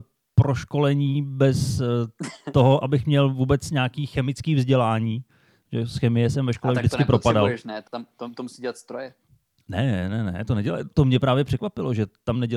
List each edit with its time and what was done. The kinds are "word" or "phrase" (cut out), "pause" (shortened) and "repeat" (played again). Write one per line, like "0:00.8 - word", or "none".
0:10.9 - word